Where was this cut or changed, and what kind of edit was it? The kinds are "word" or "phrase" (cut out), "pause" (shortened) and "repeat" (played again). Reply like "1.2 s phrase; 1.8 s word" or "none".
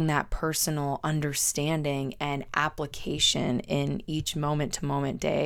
none